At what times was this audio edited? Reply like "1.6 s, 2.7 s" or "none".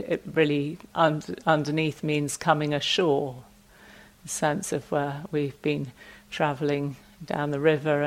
0.9 s